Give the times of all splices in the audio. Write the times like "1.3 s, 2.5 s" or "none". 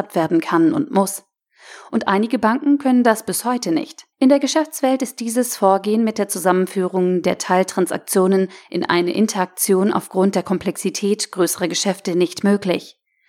4.1 s